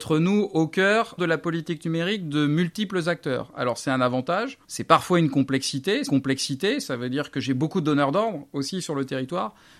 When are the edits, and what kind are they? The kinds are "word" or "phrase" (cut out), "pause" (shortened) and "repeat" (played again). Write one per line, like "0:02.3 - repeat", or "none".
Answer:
0:01.2 - phrase
0:04.6 - pause
0:06.1 - repeat